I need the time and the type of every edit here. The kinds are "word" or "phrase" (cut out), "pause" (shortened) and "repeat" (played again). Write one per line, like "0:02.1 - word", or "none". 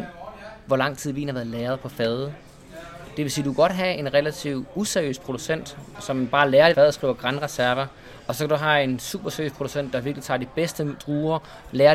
0:05.9 - word
0:06.7 - phrase